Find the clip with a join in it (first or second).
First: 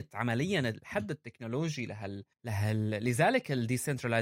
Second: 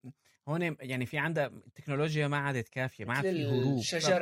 first